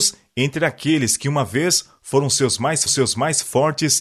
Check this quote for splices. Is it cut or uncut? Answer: cut